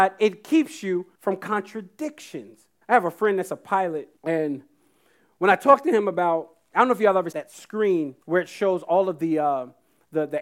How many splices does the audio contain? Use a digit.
5